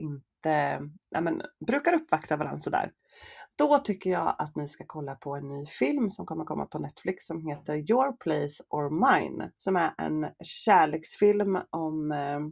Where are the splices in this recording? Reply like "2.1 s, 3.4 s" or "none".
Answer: 1.6 s, 9.6 s